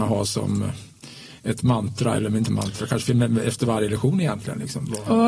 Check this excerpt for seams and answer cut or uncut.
uncut